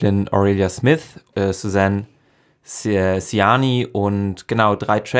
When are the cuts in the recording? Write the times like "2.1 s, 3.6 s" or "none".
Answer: 1.3 s